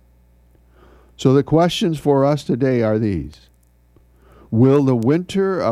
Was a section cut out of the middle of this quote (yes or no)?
no